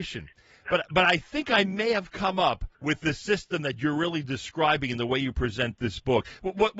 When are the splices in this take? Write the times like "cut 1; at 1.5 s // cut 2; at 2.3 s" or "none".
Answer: cut 1; at 2.7 s